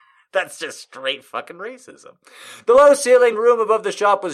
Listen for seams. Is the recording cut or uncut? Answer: uncut